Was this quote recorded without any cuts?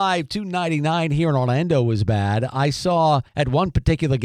no; 1 cut; at 3.3 s

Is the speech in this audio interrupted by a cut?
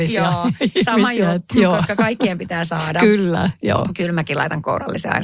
yes; 1 cut; at 1.5 s

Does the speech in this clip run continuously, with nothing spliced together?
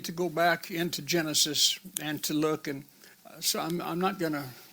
no; 1 cut; at 3.1 s

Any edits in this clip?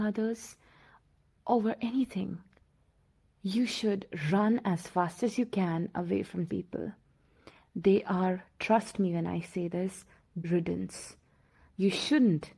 yes; 2 cuts; at 6.5 s, 10.4 s

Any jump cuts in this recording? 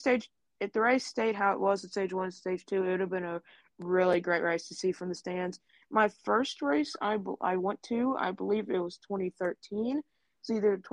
no; 0 cuts

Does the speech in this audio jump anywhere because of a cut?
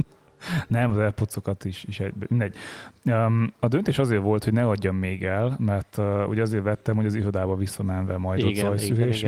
no; 0 cuts

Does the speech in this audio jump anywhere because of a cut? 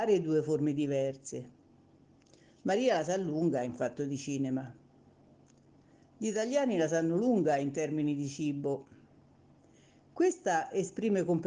no; 0 cuts

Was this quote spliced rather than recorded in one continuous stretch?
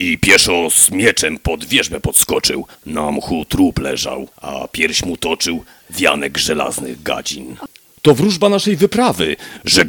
yes; 2 cuts; at 2.8 s, 4.3 s

